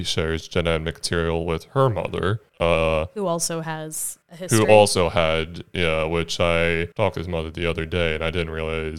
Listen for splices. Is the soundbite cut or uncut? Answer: cut